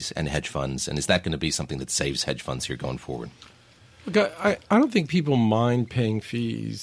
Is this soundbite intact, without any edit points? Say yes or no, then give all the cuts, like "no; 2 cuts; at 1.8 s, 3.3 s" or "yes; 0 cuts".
yes; 0 cuts